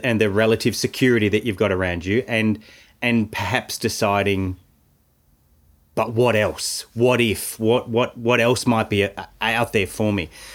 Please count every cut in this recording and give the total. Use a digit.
0